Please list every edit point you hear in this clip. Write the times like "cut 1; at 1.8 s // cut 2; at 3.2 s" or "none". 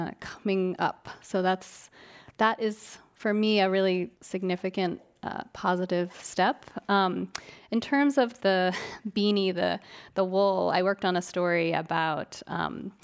cut 1; at 4.1 s